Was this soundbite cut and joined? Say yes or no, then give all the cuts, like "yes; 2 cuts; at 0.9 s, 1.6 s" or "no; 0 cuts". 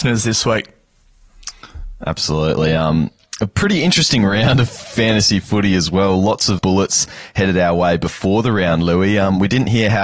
yes; 1 cut; at 6.6 s